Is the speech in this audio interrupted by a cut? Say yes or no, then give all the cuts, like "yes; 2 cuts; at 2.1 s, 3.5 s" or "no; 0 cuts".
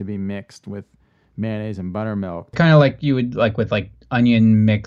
yes; 1 cut; at 2.5 s